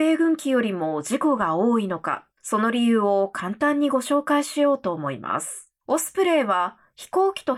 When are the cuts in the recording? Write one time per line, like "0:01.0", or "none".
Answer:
0:02.3
0:05.8